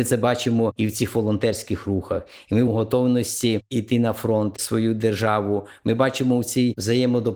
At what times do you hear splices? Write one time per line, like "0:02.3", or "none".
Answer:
0:02.7
0:04.6